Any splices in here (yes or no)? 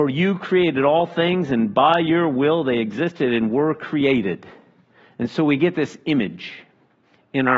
no